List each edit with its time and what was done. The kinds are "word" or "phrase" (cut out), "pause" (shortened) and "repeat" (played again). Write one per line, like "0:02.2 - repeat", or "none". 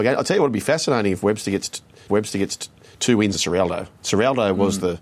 0:02.1 - repeat
0:03.3 - word
0:04.0 - pause